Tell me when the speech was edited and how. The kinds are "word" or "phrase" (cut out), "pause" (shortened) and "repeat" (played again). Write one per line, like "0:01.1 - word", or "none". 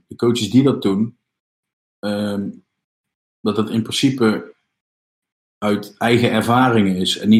none